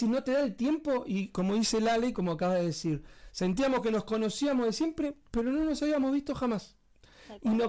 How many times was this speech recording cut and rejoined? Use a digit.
0